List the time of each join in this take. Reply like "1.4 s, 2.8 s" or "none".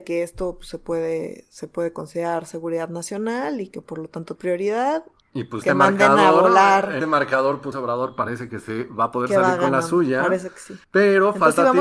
4.4 s, 5.2 s, 5.6 s, 7.0 s, 7.7 s, 10.8 s

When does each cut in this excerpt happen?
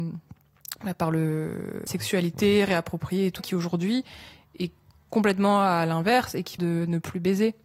1.9 s, 3.4 s, 6.6 s

